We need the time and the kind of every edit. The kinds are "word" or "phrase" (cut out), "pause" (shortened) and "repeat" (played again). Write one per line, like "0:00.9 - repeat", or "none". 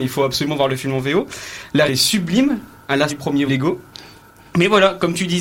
0:01.9 - word
0:03.1 - word
0:03.5 - word